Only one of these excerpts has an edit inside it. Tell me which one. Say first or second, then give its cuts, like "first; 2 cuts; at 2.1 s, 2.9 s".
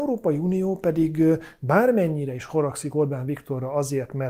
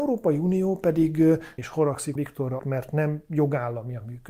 second; 3 cuts; at 1.6 s, 2.2 s, 2.6 s